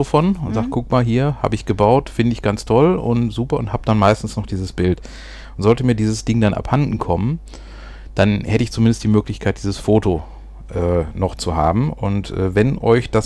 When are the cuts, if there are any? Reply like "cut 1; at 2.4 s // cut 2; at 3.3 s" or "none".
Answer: none

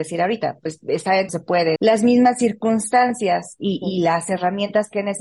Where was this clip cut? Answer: cut 1; at 1.3 s // cut 2; at 1.8 s

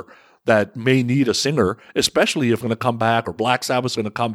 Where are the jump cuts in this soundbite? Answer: cut 1; at 2.6 s

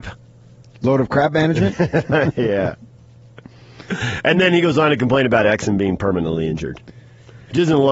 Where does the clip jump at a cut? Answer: none

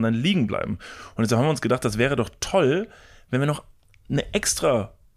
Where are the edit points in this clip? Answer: none

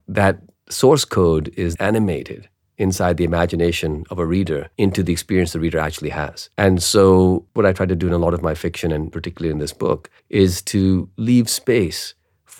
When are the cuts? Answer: cut 1; at 1.8 s // cut 2; at 4.7 s // cut 3; at 6.5 s // cut 4; at 10.2 s

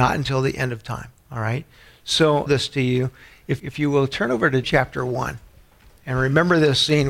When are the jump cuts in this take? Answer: cut 1; at 1.1 s // cut 2; at 2.5 s // cut 3; at 3.6 s // cut 4; at 4.6 s

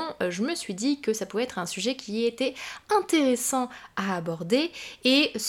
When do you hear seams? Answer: none

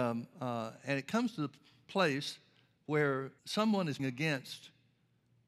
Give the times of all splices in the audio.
cut 1; at 3.4 s // cut 2; at 4.0 s

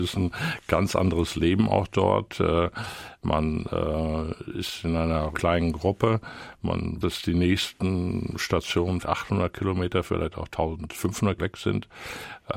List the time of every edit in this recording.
cut 1; at 5.3 s // cut 2; at 7.0 s // cut 3; at 9.0 s // cut 4; at 11.4 s

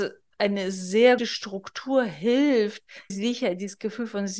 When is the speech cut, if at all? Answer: cut 1; at 1.2 s // cut 2; at 3.1 s

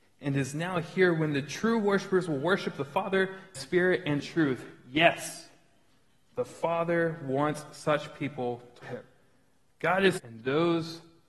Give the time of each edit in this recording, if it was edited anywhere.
cut 1; at 3.5 s // cut 2; at 4.2 s // cut 3; at 8.8 s // cut 4; at 10.2 s

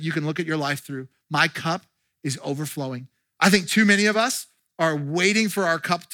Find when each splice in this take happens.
none

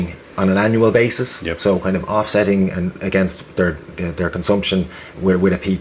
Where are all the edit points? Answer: none

